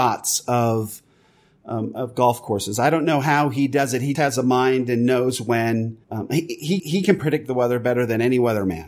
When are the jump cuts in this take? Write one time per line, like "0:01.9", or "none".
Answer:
0:04.1
0:06.0
0:06.8